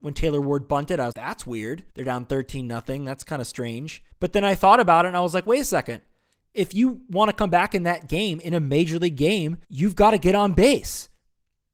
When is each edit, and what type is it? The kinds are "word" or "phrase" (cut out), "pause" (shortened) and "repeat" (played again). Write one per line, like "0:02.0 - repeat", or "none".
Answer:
0:01.1 - word
0:01.9 - pause
0:04.1 - pause
0:09.6 - pause